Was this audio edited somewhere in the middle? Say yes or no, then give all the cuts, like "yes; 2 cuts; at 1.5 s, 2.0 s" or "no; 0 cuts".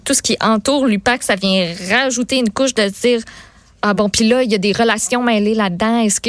no; 0 cuts